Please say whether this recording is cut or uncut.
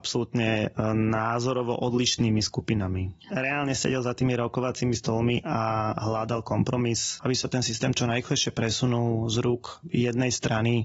uncut